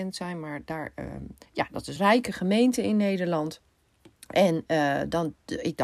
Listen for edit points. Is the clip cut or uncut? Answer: cut